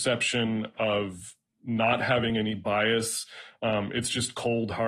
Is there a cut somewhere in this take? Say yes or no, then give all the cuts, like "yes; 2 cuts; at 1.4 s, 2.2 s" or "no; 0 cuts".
no; 0 cuts